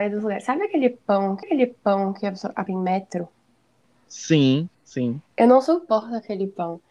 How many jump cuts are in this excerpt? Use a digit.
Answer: 3